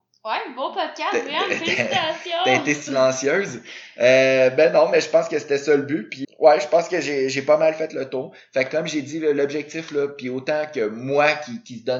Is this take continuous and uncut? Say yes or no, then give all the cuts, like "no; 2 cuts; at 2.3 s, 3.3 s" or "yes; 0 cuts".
no; 1 cut; at 6.2 s